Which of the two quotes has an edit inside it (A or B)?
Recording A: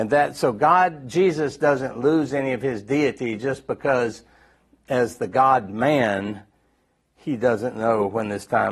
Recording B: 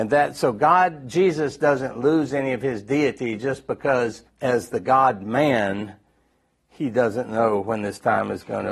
B